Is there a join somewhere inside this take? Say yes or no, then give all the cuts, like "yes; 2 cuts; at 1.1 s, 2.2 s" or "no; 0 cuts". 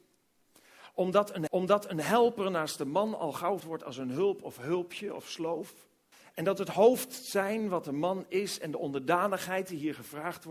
yes; 3 cuts; at 1.5 s, 3.6 s, 6.1 s